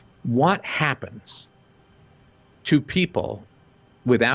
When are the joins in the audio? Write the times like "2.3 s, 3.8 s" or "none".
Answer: none